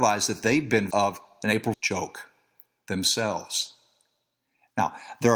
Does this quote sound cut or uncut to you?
cut